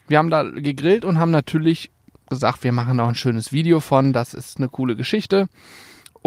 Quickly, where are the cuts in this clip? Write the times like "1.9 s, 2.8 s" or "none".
none

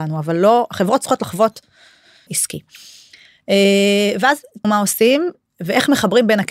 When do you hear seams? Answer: 2.3 s, 4.6 s

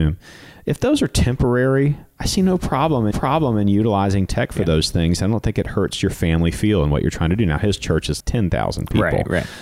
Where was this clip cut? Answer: 3.1 s, 8.2 s

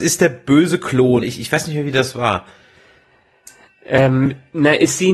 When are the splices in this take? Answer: 1.2 s

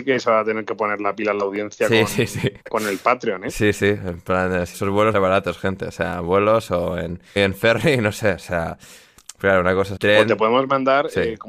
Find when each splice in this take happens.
2.6 s, 4.7 s, 5.1 s, 7.4 s, 10.0 s

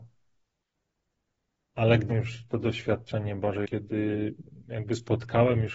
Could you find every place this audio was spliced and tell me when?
2.1 s, 3.6 s

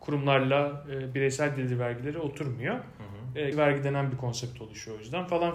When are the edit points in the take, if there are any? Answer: 3.5 s

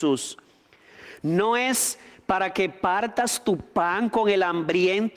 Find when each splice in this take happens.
none

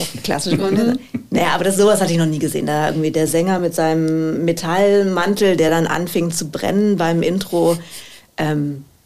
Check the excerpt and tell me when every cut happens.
none

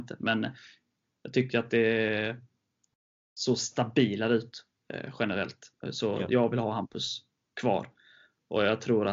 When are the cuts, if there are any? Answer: 5.8 s

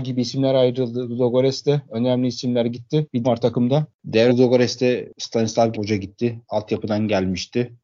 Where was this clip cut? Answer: 3.2 s, 4.3 s, 5.7 s

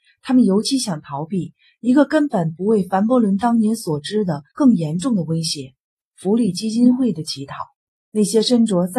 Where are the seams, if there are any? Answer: 4.5 s, 7.8 s

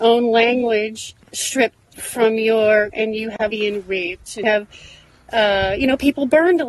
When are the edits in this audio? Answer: 1.3 s, 1.8 s, 2.9 s, 3.5 s, 4.4 s

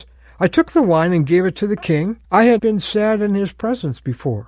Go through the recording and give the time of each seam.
2.2 s, 2.6 s

